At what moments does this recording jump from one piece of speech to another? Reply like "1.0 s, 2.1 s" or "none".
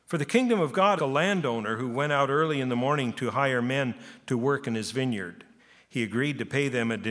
1.0 s, 5.6 s